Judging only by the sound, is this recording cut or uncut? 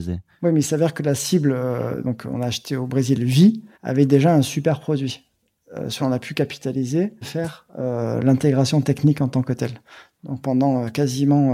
cut